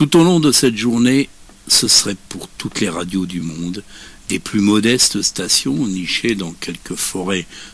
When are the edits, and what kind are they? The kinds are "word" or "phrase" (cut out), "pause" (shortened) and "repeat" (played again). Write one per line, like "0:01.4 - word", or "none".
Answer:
none